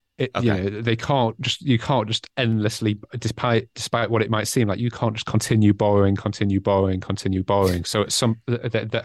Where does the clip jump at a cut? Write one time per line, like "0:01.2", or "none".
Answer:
none